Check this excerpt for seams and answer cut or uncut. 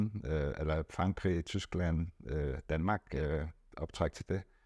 uncut